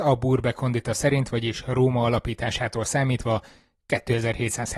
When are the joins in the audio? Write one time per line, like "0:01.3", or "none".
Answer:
none